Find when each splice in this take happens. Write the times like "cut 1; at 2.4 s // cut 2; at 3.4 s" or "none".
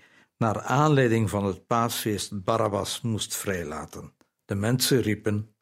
cut 1; at 4.4 s